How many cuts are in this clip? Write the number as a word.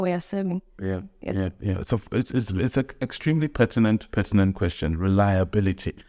one